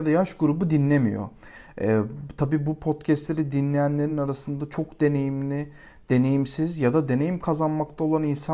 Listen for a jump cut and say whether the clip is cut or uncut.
uncut